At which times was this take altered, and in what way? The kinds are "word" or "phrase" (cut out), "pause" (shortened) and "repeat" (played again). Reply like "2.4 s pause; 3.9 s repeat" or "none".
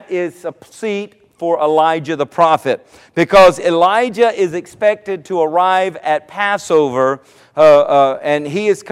none